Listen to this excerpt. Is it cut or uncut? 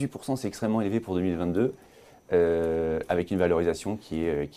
uncut